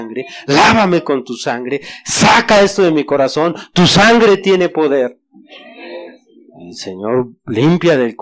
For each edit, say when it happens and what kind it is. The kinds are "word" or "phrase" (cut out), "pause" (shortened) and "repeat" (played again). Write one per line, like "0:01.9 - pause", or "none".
none